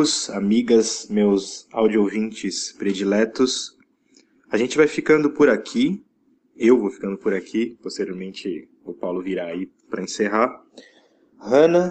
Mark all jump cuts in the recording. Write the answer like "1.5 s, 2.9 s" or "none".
none